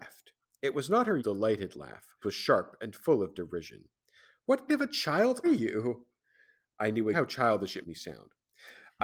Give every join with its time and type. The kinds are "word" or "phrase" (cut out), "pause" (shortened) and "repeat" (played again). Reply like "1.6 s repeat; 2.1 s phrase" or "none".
1.2 s word; 2.2 s word; 4.7 s word; 5.4 s word; 7.1 s word; 7.8 s word